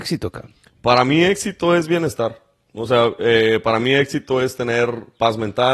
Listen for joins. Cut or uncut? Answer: uncut